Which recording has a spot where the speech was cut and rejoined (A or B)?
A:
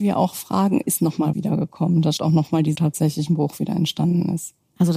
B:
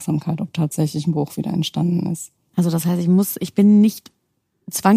A